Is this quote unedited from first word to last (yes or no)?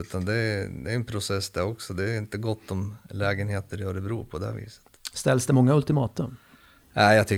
yes